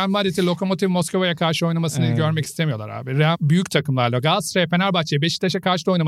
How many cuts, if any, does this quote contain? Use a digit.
1